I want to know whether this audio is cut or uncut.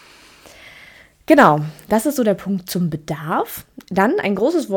uncut